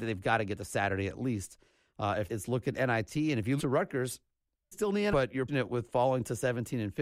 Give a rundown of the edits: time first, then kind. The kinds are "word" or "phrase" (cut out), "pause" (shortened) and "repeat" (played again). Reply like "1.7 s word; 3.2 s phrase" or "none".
2.3 s word; 3.6 s word; 4.7 s word; 5.1 s word; 5.5 s word